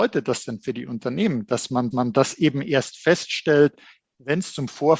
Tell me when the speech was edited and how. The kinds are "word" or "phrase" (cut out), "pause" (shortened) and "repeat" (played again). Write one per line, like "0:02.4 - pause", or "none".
0:01.9 - repeat